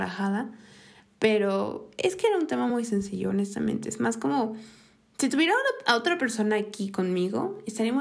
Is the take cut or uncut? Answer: uncut